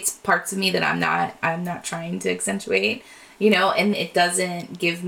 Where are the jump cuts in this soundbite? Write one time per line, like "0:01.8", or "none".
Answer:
0:03.9